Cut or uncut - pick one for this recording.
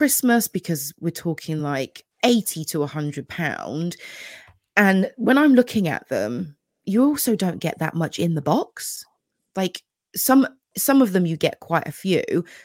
uncut